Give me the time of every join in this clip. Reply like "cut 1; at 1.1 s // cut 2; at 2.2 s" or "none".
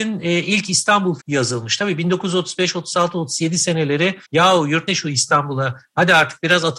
cut 1; at 1.2 s // cut 2; at 4.2 s // cut 3; at 4.9 s